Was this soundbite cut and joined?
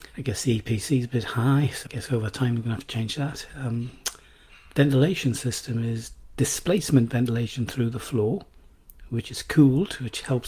yes; 1 cut; at 1.9 s

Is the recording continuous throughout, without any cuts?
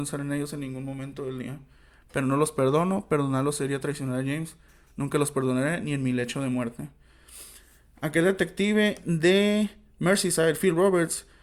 yes; 0 cuts

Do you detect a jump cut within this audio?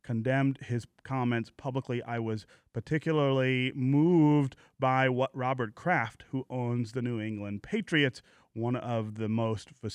no; 0 cuts

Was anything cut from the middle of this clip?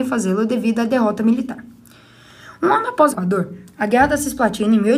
yes; 1 cut; at 3.1 s

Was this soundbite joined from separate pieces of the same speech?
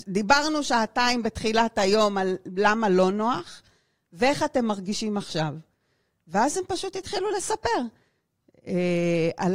no; 0 cuts

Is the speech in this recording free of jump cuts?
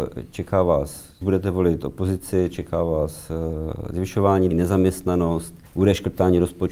no; 3 cuts; at 1.2 s, 4.5 s, 5.7 s

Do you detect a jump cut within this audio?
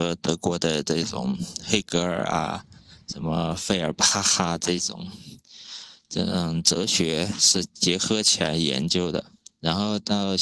no; 0 cuts

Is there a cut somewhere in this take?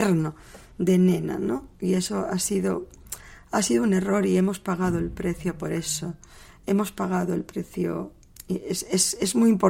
no; 0 cuts

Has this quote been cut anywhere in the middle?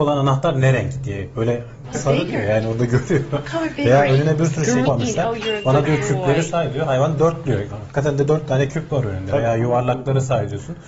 yes; 2 cuts; at 1.9 s, 4.9 s

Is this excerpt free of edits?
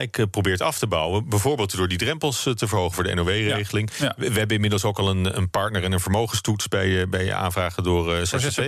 yes; 0 cuts

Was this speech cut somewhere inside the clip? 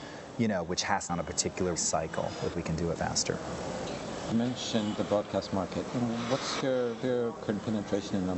yes; 9 cuts; at 1.1 s, 1.8 s, 2.5 s, 3.0 s, 4.3 s, 5.0 s, 6.6 s, 7.0 s, 7.4 s

